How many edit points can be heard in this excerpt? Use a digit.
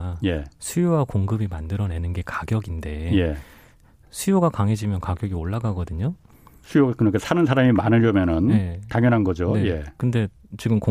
0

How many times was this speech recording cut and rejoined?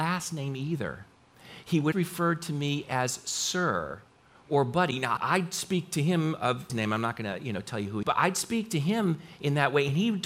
4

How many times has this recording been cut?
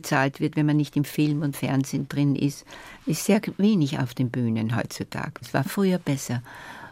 2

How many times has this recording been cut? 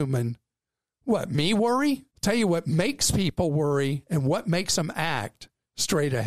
1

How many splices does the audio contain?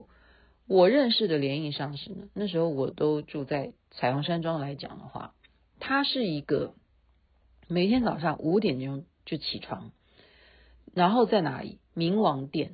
0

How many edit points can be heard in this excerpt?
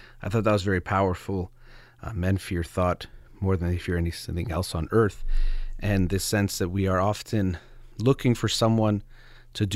1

